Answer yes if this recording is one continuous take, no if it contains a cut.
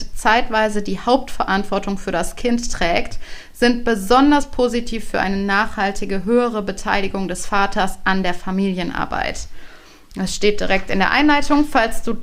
yes